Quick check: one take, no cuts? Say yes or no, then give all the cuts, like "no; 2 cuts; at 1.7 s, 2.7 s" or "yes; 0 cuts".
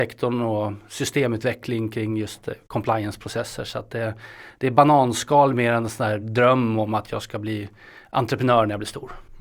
yes; 0 cuts